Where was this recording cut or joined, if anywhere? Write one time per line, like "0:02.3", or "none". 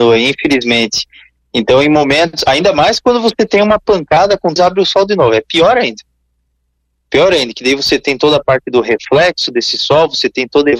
0:04.6